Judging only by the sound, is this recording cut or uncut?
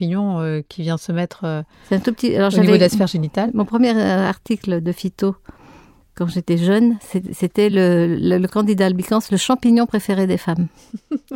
uncut